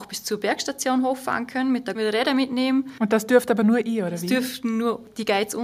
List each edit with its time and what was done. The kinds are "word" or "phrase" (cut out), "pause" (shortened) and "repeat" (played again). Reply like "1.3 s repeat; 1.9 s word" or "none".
1.9 s phrase